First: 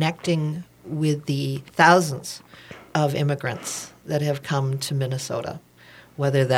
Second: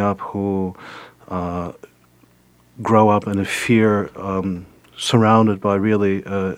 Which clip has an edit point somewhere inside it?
first; 1 cut; at 1.7 s

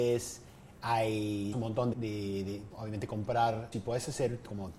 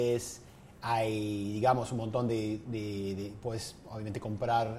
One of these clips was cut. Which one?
first; 4 cuts; at 1.5 s, 1.9 s, 2.7 s, 3.7 s

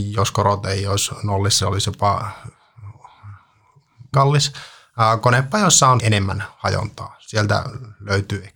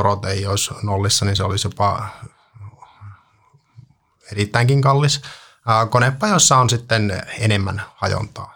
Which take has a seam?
first; 3 cuts; at 1.6 s, 4.1 s, 6.0 s

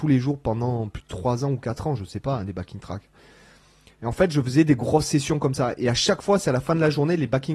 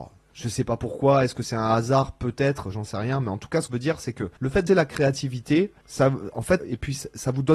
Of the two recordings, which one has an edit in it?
second; 5 cuts; at 3.7 s, 4.4 s, 4.7 s, 5.8 s, 6.6 s

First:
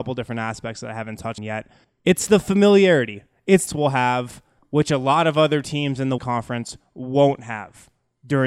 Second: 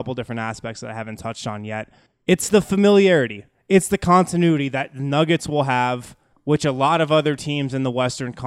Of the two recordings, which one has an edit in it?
first; 3 cuts; at 1.4 s, 3.7 s, 6.2 s

